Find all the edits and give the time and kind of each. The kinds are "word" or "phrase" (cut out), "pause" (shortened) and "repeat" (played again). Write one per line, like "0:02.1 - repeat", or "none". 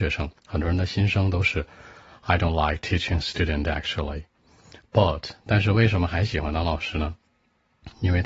none